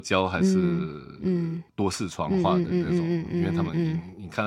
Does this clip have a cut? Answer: yes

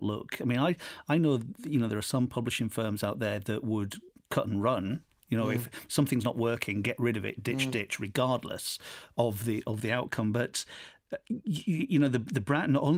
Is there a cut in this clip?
no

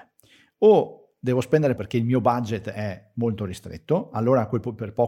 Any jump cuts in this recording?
yes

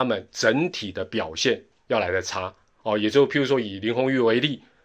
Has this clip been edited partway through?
no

